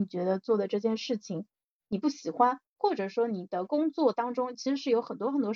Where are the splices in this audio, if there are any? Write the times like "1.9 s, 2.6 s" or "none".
none